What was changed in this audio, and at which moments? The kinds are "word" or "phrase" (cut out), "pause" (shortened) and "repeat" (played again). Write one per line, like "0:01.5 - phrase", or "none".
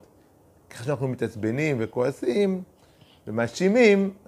none